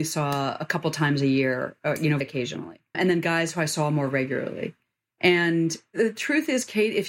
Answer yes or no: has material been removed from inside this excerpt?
yes